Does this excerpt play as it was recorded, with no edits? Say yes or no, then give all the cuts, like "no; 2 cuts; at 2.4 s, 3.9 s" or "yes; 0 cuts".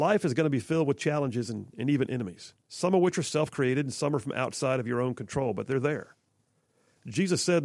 no; 1 cut; at 2.6 s